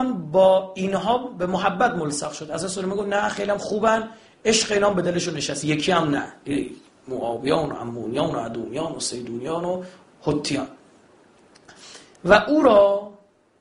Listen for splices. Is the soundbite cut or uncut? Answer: uncut